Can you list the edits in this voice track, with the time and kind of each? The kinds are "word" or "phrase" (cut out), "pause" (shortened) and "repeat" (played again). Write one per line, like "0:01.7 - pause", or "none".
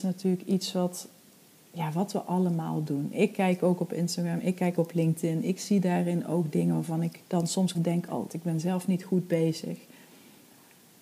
0:04.8 - word
0:07.2 - pause
0:07.7 - phrase
0:08.3 - word